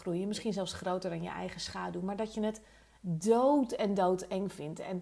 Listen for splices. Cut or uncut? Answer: uncut